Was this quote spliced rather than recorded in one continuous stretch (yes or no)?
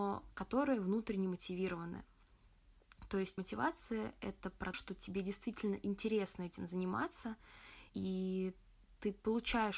yes